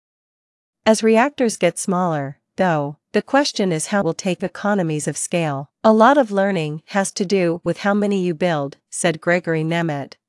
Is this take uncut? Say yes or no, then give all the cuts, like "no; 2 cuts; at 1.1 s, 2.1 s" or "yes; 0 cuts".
no; 3 cuts; at 4.0 s, 4.4 s, 5.7 s